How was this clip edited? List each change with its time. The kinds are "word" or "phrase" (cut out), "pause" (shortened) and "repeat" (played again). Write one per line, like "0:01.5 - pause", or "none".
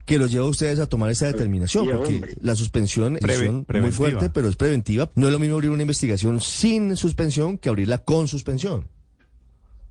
0:02.4 - word
0:03.2 - phrase
0:05.1 - phrase